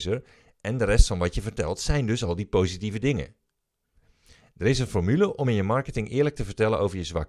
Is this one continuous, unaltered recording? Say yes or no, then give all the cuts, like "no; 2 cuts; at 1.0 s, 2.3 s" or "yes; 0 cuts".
yes; 0 cuts